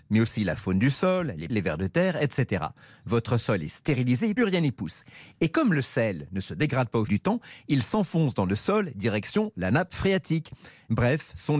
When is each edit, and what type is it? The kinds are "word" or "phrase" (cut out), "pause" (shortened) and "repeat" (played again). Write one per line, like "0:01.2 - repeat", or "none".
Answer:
0:01.5 - word
0:04.4 - word
0:07.1 - word